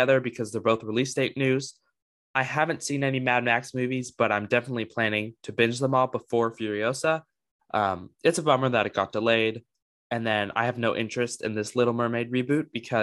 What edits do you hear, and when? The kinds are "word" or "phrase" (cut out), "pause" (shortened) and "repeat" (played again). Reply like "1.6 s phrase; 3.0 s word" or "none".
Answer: none